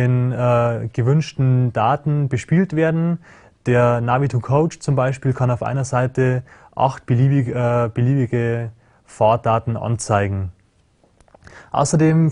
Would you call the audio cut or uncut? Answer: uncut